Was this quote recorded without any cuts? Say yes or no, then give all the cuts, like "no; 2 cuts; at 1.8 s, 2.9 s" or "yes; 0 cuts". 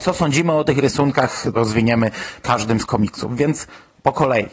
no; 3 cuts; at 1.5 s, 2.4 s, 2.9 s